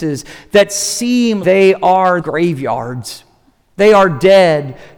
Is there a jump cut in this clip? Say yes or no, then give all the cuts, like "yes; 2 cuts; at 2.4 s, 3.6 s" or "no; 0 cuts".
yes; 2 cuts; at 1.4 s, 2.2 s